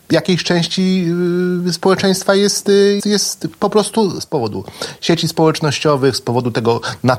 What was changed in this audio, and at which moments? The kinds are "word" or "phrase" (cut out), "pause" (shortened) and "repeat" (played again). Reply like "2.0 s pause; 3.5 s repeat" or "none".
3.0 s word; 4.2 s word